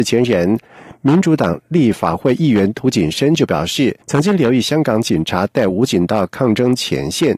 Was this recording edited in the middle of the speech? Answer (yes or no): yes